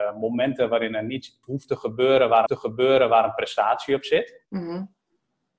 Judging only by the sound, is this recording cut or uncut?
cut